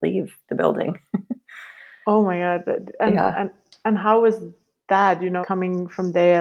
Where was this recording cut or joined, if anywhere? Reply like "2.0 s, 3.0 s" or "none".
5.4 s